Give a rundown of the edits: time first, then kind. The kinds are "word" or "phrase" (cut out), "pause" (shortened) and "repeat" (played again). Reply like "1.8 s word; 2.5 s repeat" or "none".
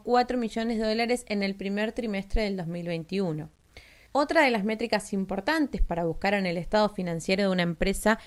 none